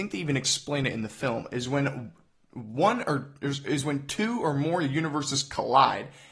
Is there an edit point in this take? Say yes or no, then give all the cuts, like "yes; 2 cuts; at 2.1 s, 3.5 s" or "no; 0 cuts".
no; 0 cuts